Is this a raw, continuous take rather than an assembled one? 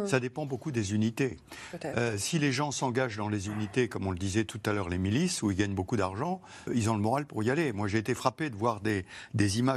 no; 1 cut; at 6.7 s

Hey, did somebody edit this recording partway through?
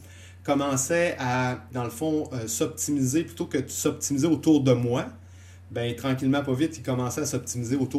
yes; 1 cut; at 1.7 s

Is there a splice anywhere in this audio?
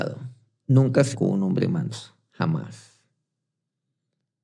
yes; 1 cut; at 1.1 s

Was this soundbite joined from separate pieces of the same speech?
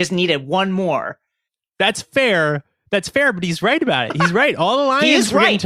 no; 0 cuts

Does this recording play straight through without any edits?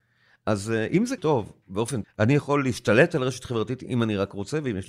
no; 2 cuts; at 1.2 s, 2.0 s

